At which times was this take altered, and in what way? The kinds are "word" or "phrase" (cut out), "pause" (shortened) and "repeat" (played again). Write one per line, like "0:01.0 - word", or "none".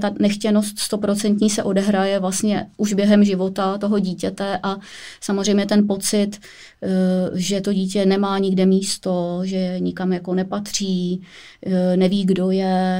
none